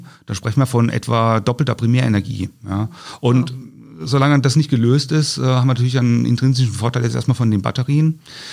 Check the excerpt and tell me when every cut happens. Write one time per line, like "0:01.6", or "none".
none